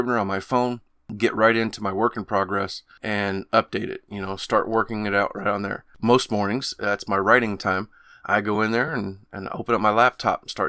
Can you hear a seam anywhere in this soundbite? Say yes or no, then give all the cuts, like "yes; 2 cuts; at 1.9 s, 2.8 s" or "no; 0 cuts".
no; 0 cuts